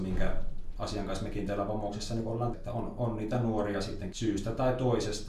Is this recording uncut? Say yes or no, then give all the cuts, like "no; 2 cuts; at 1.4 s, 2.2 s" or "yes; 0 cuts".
no; 2 cuts; at 2.5 s, 4.1 s